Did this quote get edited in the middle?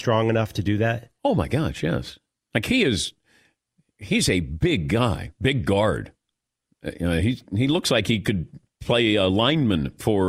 yes; 2 cuts; at 1.2 s, 2.3 s

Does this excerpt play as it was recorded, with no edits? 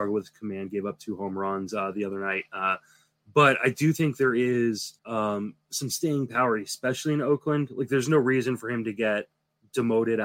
no; 1 cut; at 5.0 s

